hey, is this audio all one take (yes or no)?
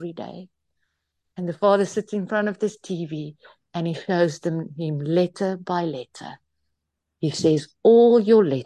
yes